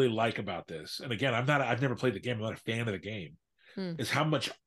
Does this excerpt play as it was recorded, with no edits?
yes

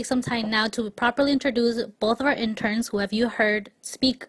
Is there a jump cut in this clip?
no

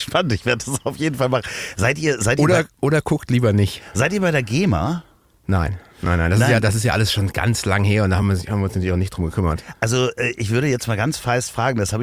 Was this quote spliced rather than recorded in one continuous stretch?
no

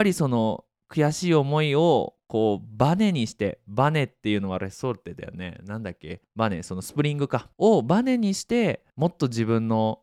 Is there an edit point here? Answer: yes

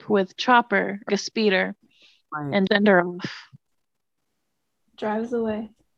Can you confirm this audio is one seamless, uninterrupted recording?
no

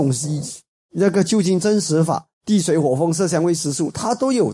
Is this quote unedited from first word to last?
no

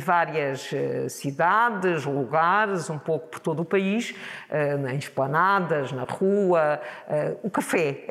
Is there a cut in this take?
no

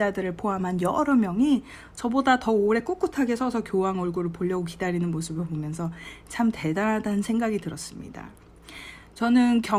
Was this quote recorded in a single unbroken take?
yes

